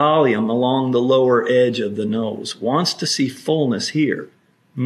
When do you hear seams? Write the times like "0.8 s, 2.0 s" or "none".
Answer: none

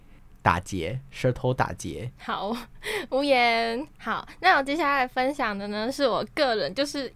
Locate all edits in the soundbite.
2.2 s

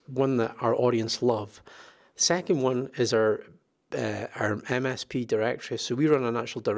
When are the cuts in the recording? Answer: none

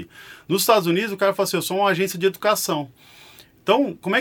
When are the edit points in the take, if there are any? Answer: none

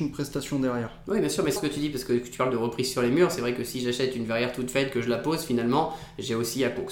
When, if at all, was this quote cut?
1.6 s

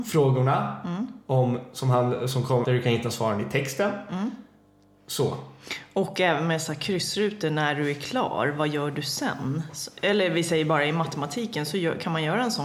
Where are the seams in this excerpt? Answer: 2.6 s

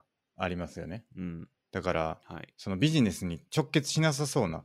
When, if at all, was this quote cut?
3.5 s

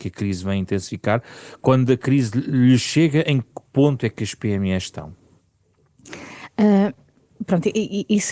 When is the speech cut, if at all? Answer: none

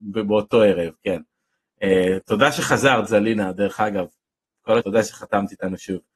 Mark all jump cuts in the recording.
4.8 s

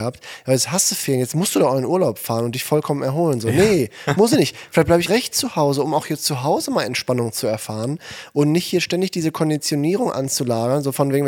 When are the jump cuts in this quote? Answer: 5.1 s

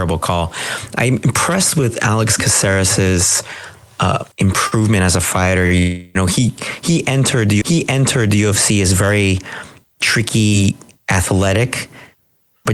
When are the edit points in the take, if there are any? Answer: 4.3 s, 7.6 s

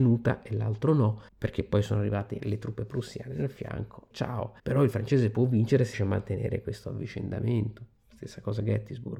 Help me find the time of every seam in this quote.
1.3 s, 2.4 s, 4.1 s, 4.6 s, 5.9 s

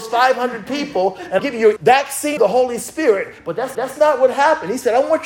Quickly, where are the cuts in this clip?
1.4 s, 1.8 s, 2.4 s, 3.7 s

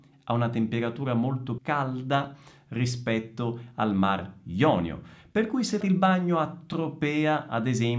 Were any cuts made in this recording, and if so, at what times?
1.6 s, 5.8 s

